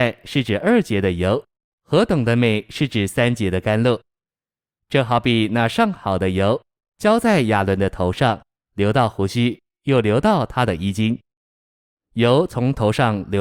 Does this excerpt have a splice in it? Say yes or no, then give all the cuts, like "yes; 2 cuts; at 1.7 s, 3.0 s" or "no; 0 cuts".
no; 0 cuts